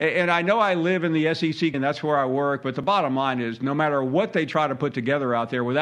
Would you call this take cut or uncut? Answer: cut